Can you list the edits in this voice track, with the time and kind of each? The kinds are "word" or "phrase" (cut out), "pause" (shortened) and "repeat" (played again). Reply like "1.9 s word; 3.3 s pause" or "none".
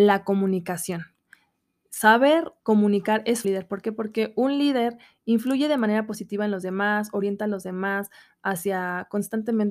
2.6 s pause; 3.4 s phrase